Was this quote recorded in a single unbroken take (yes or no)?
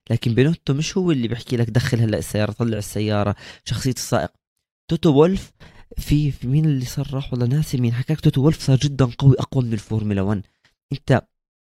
yes